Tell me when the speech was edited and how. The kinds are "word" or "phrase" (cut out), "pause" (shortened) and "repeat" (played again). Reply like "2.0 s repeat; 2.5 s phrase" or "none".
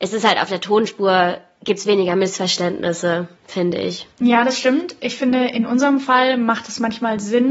3.4 s pause; 4.1 s pause